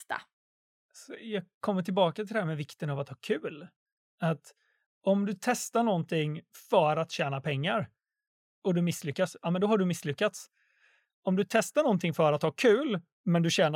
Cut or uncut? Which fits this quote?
uncut